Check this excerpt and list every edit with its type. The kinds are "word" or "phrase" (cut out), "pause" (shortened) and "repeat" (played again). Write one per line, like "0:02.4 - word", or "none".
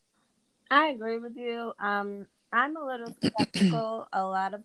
0:02.4 - pause